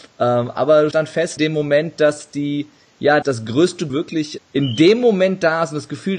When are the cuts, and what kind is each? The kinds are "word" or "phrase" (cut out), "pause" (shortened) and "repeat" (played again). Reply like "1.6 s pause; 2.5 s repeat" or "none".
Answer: 0.9 s word; 1.4 s word; 3.2 s word; 3.9 s word; 4.4 s word